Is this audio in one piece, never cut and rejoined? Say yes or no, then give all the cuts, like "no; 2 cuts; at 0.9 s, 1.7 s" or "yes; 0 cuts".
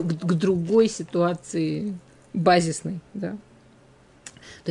no; 1 cut; at 2.1 s